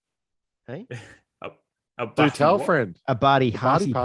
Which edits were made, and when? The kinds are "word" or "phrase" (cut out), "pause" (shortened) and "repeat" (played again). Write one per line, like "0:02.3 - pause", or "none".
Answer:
none